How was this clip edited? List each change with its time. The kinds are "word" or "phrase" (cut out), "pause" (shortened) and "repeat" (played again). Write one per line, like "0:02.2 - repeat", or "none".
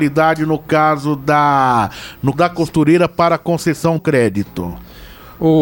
0:02.3 - word
0:04.0 - word